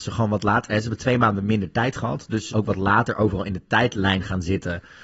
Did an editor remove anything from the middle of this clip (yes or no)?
yes